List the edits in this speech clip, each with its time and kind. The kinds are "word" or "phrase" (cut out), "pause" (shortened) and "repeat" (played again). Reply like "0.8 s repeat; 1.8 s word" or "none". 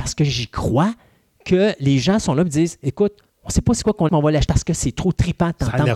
3.3 s pause; 4.1 s word; 4.5 s word